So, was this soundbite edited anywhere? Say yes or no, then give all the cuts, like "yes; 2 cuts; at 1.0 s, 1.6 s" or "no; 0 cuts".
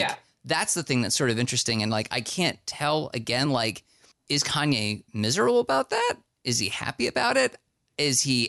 no; 0 cuts